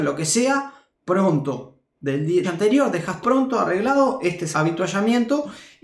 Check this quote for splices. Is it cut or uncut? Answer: cut